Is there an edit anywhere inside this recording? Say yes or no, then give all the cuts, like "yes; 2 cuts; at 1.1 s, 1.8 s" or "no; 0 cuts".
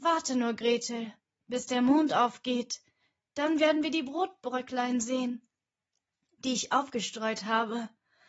no; 0 cuts